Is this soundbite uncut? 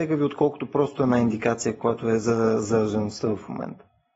yes; 0 cuts

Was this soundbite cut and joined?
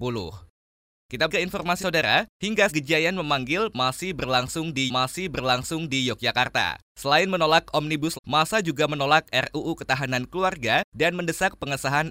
yes; 5 cuts; at 1.3 s, 1.8 s, 2.7 s, 4.9 s, 8.1 s

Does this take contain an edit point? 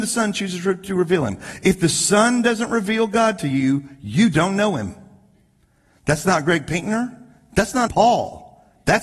yes; 1 cut; at 7.9 s

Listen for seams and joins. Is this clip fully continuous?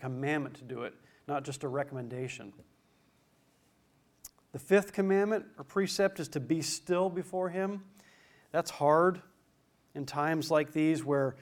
yes; 0 cuts

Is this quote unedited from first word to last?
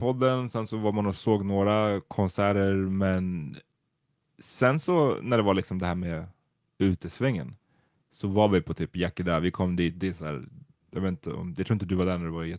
yes; 0 cuts

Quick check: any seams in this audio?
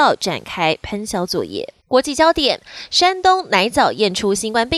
yes; 1 cut; at 1.8 s

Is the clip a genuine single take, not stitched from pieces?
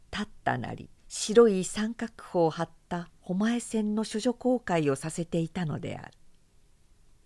no; 1 cut; at 1.0 s

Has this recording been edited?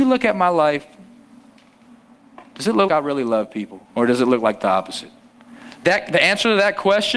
yes; 3 cuts; at 2.9 s, 3.9 s, 5.8 s

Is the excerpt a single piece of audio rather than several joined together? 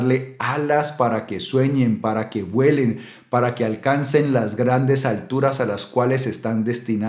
yes; 0 cuts

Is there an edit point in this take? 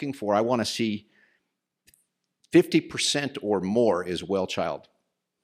no; 0 cuts

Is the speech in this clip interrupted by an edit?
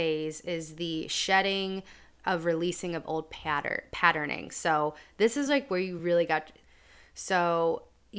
no; 0 cuts

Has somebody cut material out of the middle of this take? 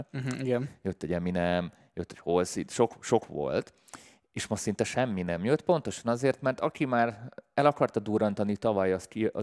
no; 0 cuts

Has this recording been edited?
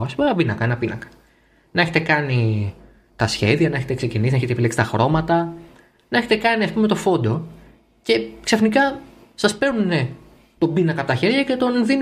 no; 0 cuts

